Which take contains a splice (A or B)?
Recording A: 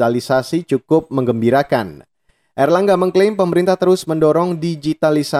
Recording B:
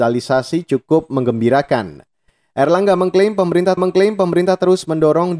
B